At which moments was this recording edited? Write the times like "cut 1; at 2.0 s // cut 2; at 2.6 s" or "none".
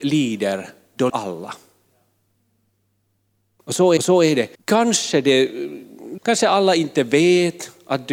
cut 1; at 1.1 s // cut 2; at 4.0 s // cut 3; at 4.5 s // cut 4; at 6.2 s